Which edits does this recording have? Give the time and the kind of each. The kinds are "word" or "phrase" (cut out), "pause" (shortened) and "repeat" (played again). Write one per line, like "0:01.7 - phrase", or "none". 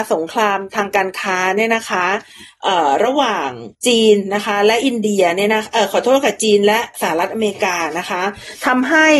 0:03.7 - pause